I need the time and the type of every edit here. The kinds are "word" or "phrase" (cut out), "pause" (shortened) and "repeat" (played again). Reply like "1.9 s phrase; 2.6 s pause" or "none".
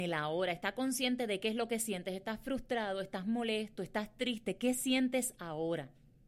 none